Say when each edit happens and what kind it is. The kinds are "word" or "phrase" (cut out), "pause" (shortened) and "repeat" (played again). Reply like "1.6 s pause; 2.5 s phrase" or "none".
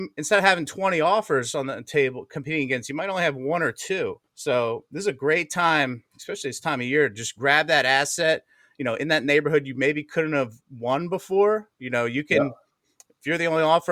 4.3 s pause